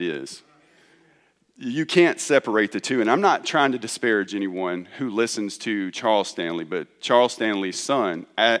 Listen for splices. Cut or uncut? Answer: uncut